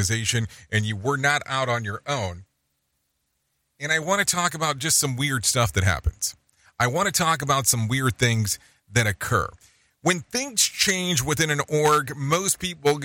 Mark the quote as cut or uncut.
uncut